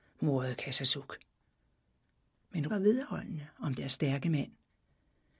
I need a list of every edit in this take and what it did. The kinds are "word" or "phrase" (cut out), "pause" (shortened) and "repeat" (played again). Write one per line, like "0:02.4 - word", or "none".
0:02.7 - word
0:03.8 - word